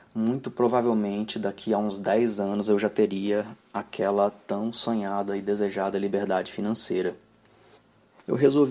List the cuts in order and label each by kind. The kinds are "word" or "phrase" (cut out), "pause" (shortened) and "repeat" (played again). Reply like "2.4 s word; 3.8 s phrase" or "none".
none